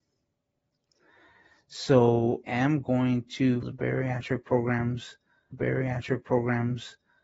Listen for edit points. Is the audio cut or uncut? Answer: cut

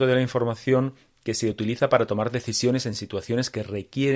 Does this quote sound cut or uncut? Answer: uncut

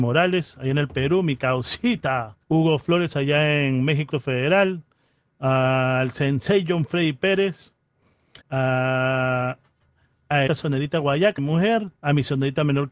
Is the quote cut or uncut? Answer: cut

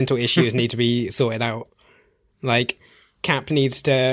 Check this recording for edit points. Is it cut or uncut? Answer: uncut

